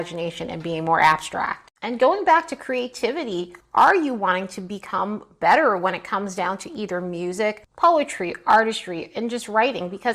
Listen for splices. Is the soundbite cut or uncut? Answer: uncut